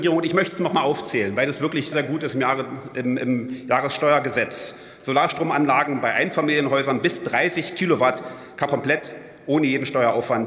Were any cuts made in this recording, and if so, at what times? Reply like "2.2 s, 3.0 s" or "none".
1.9 s, 8.7 s